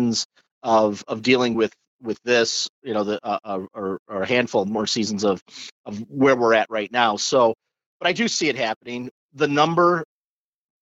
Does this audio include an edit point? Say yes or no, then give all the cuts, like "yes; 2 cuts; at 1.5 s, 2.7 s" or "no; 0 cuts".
no; 0 cuts